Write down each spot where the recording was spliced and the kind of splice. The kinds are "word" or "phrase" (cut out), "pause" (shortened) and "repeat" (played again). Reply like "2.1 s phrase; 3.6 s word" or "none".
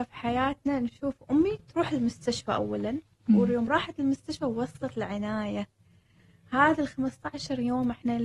none